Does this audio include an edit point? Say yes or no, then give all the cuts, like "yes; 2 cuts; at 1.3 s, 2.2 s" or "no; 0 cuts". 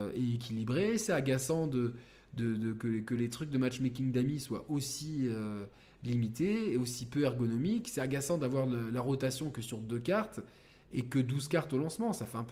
no; 0 cuts